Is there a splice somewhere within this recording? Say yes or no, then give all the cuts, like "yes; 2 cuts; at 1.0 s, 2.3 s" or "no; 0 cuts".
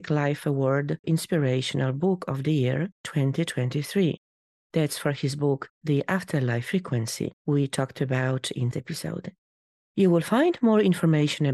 yes; 2 cuts; at 1.0 s, 8.7 s